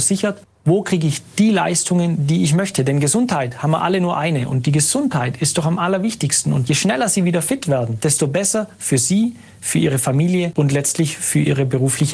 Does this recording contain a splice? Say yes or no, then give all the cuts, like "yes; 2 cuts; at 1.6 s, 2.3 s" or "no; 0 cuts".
no; 0 cuts